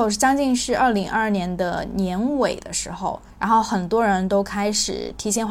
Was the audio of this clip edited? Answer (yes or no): yes